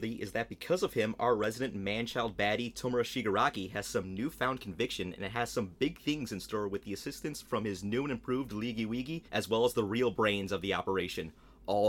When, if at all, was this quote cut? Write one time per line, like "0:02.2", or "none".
0:09.3